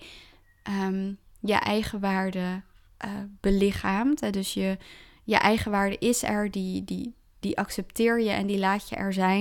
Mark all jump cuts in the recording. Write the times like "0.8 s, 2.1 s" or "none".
2.9 s